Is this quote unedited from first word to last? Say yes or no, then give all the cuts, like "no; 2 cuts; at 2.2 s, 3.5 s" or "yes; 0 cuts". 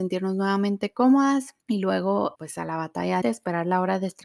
no; 3 cuts; at 1.6 s, 2.3 s, 3.2 s